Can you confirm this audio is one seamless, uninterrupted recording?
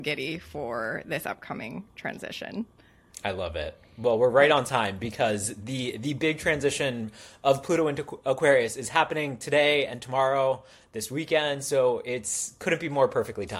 yes; 0 cuts

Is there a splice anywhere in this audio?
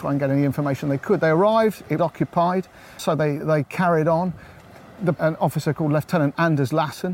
yes; 4 cuts; at 2.0 s, 3.0 s, 3.4 s, 5.1 s

